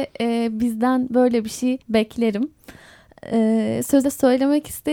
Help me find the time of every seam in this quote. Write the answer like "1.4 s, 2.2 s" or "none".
1.8 s, 4.0 s